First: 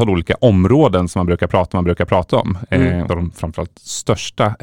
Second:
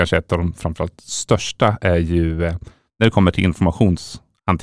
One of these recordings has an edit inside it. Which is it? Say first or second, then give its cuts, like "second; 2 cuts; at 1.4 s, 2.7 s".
first; 2 cuts; at 1.7 s, 3.1 s